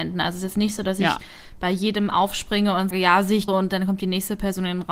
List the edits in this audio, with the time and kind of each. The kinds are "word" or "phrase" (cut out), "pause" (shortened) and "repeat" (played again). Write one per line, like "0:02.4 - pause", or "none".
0:02.9 - word
0:03.5 - word